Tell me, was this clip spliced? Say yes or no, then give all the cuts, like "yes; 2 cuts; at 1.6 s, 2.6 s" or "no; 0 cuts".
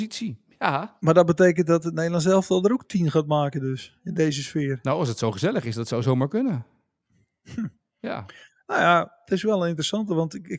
no; 0 cuts